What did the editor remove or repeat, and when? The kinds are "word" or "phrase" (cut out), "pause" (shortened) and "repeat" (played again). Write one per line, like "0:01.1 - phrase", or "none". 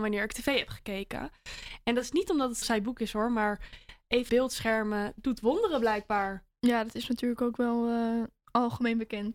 0:02.6 - phrase
0:04.3 - word